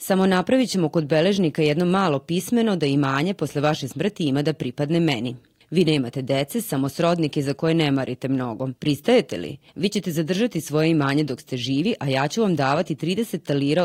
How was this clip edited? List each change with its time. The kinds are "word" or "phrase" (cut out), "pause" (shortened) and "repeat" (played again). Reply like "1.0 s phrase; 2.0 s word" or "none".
none